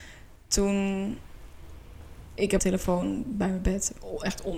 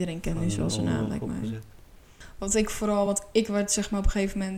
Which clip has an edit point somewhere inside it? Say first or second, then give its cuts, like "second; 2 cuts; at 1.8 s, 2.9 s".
first; 1 cut; at 2.6 s